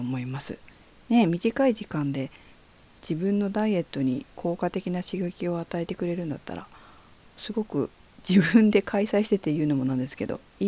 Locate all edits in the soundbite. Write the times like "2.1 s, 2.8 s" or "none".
none